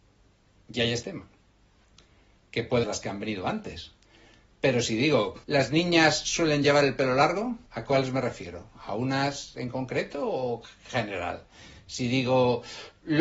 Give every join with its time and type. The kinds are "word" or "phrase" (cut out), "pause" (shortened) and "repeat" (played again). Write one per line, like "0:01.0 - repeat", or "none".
0:01.0 - word
0:02.8 - phrase
0:05.4 - pause
0:07.7 - pause

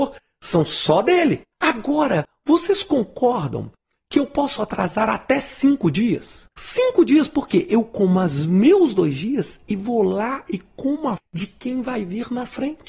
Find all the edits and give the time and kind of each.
0:01.5 - pause
0:06.5 - pause
0:11.2 - word

